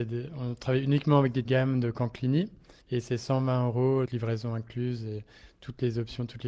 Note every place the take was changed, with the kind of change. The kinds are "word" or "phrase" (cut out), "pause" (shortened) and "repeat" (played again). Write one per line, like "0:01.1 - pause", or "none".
0:01.4 - phrase
0:02.8 - pause
0:04.1 - word